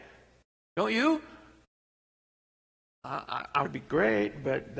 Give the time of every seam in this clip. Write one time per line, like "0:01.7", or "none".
0:03.6